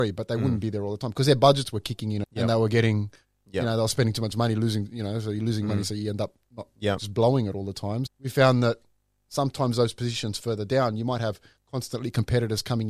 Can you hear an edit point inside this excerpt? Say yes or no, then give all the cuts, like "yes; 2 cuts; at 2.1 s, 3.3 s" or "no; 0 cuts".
yes; 2 cuts; at 2.2 s, 8.1 s